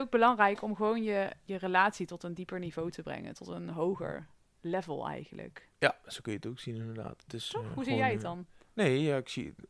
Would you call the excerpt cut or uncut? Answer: cut